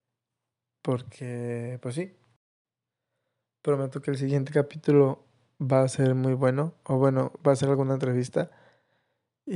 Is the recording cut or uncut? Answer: uncut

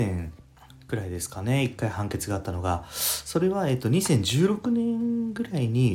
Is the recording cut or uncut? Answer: uncut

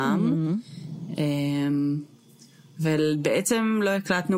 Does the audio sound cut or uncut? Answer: uncut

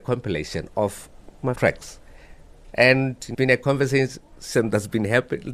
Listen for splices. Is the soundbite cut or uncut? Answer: cut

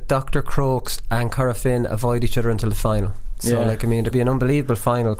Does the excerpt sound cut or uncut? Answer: cut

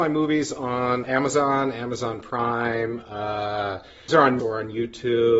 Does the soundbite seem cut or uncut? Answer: cut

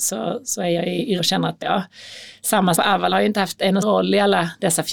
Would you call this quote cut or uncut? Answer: cut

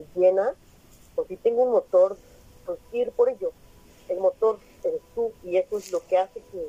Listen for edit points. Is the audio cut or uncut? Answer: cut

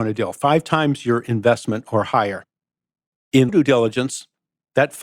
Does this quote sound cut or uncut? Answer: cut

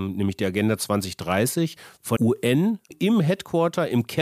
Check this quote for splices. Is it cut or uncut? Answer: cut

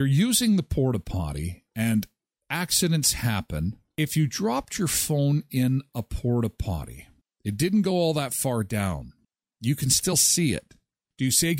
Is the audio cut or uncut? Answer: uncut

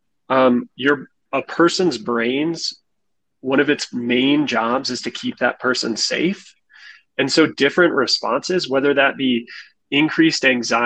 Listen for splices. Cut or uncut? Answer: uncut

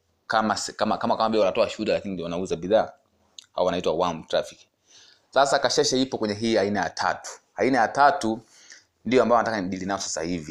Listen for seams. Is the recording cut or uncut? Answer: uncut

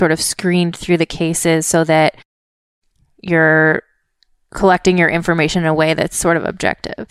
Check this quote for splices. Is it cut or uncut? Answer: uncut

